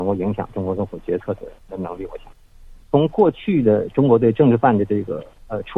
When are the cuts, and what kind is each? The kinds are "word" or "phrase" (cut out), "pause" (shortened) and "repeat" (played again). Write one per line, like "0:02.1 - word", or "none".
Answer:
0:01.6 - pause
0:02.8 - pause